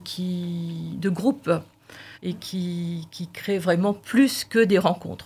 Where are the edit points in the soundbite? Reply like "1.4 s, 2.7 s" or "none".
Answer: 2.1 s